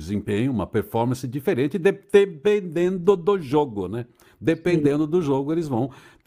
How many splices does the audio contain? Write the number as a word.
zero